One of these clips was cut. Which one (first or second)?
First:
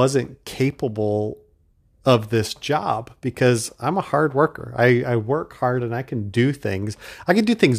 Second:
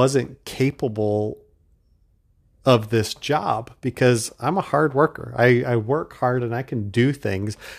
first